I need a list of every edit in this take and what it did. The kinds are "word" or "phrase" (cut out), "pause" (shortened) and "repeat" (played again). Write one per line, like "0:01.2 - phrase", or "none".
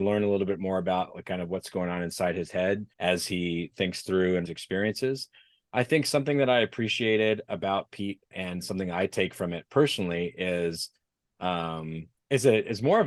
0:02.9 - pause
0:04.5 - phrase
0:08.3 - word